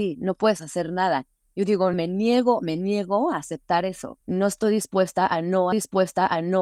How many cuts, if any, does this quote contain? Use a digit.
3